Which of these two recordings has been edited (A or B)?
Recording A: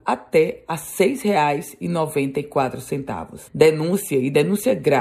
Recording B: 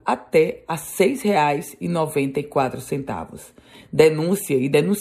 A